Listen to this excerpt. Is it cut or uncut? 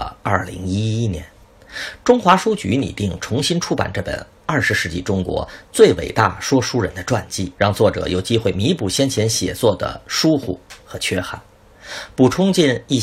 cut